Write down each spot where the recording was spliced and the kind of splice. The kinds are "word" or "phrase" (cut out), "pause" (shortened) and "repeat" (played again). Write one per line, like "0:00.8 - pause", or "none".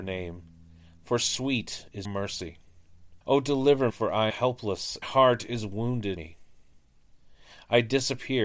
0:02.0 - word
0:03.2 - pause
0:03.9 - word
0:04.3 - word
0:05.0 - phrase
0:06.2 - word